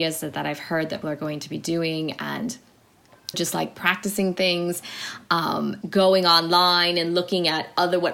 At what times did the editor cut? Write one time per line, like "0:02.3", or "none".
0:01.0
0:03.3
0:05.8